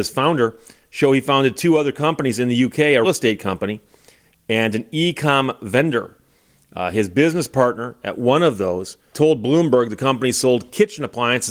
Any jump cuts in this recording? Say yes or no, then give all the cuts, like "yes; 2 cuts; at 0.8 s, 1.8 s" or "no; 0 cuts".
yes; 2 cuts; at 3.0 s, 9.1 s